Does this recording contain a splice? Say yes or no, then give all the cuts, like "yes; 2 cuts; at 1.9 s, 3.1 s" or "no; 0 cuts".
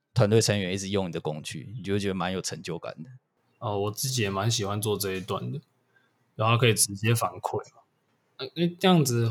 no; 0 cuts